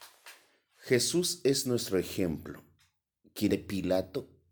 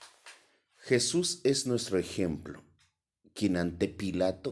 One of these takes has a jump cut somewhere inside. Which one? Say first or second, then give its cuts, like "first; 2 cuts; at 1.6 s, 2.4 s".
first; 1 cut; at 3.5 s